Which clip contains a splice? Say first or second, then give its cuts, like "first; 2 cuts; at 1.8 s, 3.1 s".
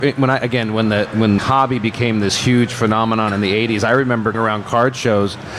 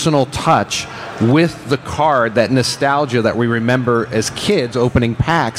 first; 2 cuts; at 1.4 s, 4.3 s